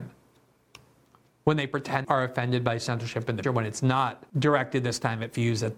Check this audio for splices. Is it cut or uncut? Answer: cut